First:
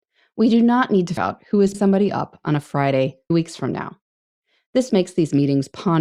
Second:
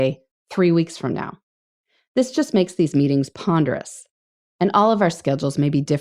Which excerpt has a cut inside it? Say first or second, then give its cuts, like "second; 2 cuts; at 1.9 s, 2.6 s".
first; 4 cuts; at 1.2 s, 1.7 s, 3.3 s, 4.9 s